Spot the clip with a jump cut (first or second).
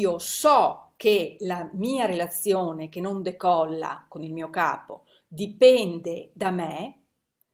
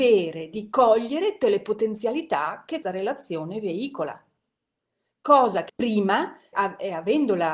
second